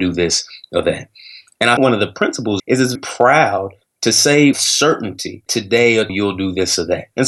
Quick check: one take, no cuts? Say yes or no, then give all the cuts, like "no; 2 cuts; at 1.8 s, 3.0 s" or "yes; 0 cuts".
no; 6 cuts; at 1.8 s, 2.6 s, 3.0 s, 4.5 s, 5.5 s, 6.1 s